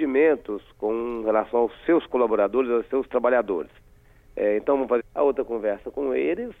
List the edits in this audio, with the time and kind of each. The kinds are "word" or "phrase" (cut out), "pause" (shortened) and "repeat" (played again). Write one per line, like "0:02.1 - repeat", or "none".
0:05.0 - phrase